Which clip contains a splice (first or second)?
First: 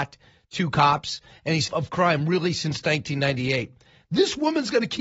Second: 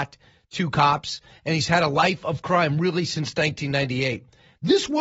first